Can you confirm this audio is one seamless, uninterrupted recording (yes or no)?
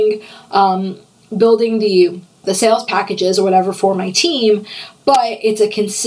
no